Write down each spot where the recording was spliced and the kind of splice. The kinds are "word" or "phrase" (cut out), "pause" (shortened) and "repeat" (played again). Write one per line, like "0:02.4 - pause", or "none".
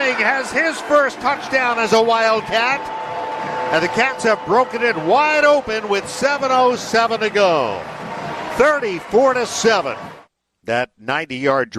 none